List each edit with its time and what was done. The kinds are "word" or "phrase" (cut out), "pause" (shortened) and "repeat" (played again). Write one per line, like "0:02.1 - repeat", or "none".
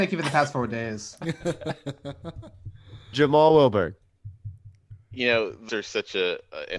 0:05.7 - word